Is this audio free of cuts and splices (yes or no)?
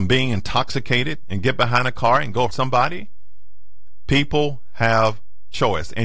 no